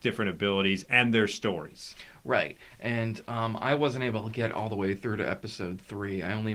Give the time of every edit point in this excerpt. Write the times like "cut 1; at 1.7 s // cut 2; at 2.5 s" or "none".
none